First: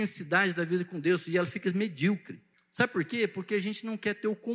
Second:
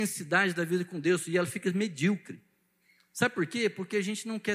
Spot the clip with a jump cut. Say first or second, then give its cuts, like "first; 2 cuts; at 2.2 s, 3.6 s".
first; 1 cut; at 2.5 s